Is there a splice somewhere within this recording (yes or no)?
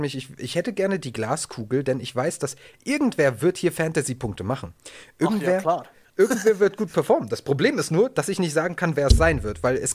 no